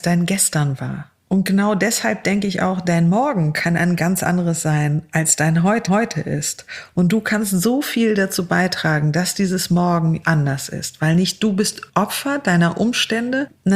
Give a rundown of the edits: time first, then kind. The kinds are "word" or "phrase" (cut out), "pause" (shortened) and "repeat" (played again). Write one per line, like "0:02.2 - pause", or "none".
0:01.2 - pause
0:05.9 - repeat
0:10.2 - word